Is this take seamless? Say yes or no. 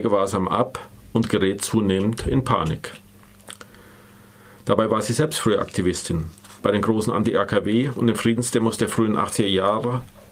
yes